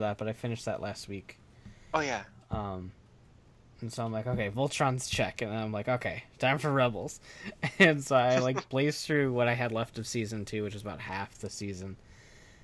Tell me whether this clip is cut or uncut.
uncut